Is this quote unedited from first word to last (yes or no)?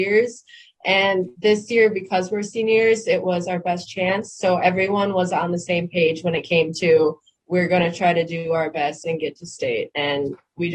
yes